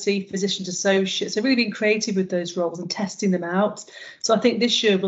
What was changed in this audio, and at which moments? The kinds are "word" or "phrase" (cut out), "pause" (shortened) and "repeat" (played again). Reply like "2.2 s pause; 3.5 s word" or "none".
none